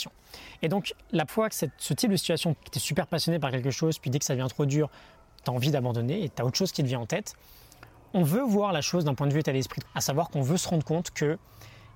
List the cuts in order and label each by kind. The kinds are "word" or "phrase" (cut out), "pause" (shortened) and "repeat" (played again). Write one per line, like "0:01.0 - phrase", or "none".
0:01.3 - word
0:02.6 - word
0:09.8 - word